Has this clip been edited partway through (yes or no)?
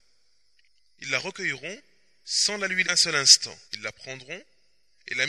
yes